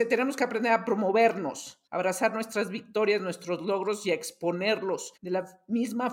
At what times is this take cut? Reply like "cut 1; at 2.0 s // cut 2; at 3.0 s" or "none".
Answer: cut 1; at 1.9 s // cut 2; at 5.2 s